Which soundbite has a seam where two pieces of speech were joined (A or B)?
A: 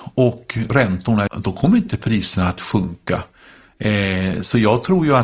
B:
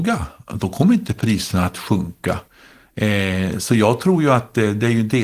A